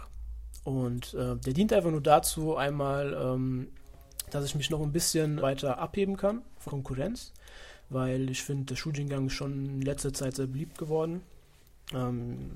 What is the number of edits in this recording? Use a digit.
2